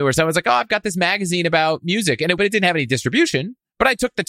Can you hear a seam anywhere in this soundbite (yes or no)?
yes